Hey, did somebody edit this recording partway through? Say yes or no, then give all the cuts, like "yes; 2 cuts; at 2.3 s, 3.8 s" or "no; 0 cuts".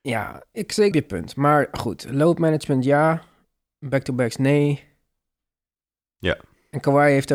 yes; 1 cut; at 0.9 s